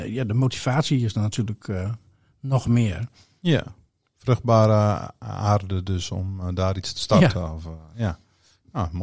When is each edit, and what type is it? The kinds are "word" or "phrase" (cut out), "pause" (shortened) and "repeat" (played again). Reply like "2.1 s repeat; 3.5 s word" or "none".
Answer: none